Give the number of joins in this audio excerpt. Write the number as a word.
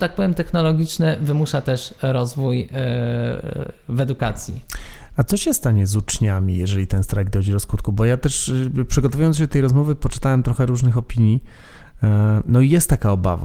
zero